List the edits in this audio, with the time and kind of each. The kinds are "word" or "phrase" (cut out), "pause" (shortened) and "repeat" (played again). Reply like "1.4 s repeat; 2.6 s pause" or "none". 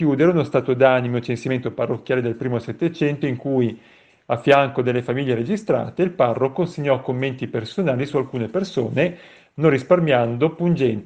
none